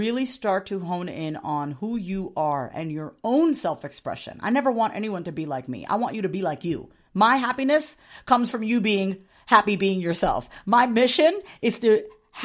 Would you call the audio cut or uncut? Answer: uncut